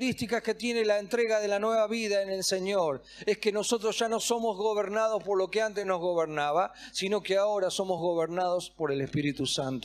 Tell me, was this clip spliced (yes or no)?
no